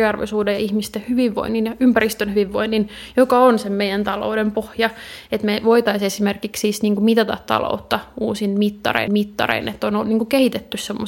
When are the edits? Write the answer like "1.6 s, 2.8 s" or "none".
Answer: 9.1 s